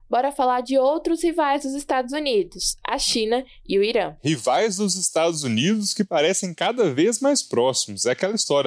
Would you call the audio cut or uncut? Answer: uncut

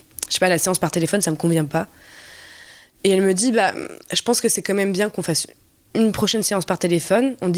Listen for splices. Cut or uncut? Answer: uncut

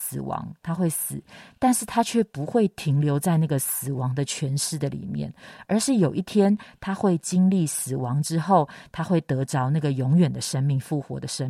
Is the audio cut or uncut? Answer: uncut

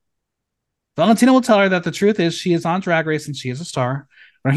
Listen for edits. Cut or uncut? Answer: uncut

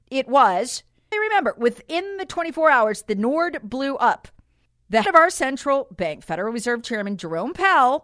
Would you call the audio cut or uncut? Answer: cut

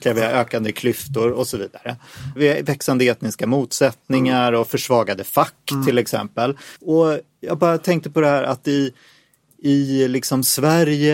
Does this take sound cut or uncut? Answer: cut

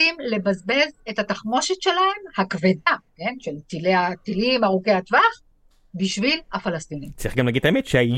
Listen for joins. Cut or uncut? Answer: uncut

